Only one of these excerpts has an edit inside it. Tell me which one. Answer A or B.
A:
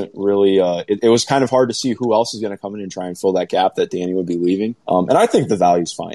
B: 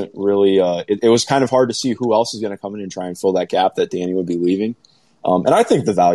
A